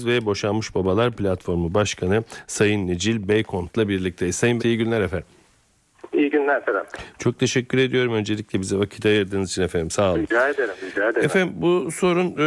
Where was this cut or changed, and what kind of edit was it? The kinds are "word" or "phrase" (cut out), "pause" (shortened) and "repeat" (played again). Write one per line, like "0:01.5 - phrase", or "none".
0:04.6 - word